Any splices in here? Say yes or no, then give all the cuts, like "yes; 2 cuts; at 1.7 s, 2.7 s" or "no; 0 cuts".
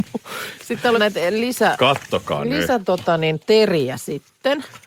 yes; 1 cut; at 1.0 s